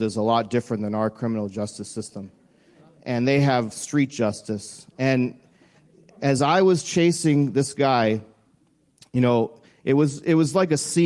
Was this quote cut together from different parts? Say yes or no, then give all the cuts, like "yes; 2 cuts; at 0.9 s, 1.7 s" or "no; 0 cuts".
no; 0 cuts